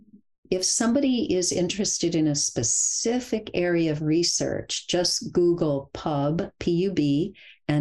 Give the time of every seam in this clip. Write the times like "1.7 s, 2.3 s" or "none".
none